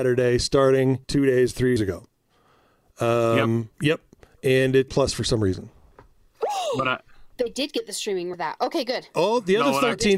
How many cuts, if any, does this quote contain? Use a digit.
7